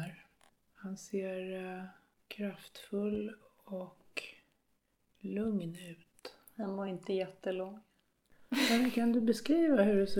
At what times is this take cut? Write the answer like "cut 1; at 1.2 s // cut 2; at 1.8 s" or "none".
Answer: none